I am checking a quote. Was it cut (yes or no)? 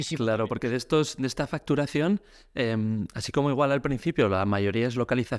no